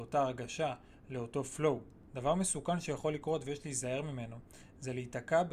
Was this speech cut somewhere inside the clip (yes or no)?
no